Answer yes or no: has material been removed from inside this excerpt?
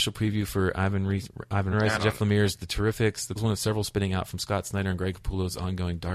yes